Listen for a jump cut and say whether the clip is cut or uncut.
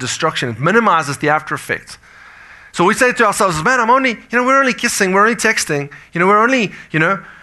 uncut